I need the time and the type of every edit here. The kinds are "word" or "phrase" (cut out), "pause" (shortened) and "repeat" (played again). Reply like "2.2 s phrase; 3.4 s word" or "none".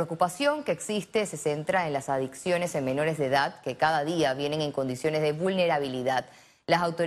none